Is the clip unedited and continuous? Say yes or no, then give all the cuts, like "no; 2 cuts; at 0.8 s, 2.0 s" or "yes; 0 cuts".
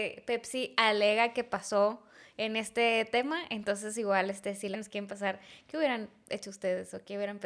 no; 1 cut; at 4.7 s